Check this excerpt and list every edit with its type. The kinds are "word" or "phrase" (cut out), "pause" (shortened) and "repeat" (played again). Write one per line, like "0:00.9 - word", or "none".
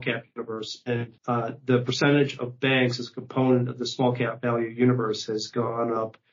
0:01.2 - pause